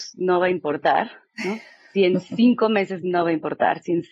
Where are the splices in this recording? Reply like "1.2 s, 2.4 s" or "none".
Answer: none